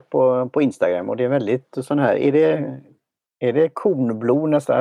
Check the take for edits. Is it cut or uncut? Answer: uncut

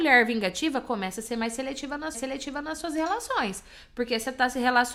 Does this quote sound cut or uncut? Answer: cut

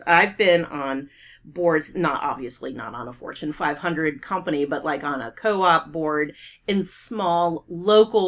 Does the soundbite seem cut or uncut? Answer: uncut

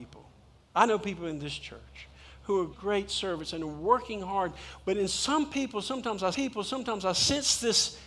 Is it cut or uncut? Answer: cut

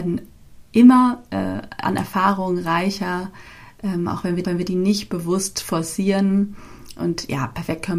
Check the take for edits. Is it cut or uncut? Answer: cut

